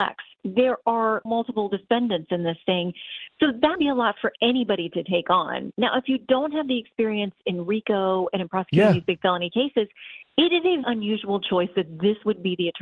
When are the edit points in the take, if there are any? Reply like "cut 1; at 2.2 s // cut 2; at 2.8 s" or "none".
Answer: cut 1; at 1.3 s // cut 2; at 3.8 s // cut 3; at 10.8 s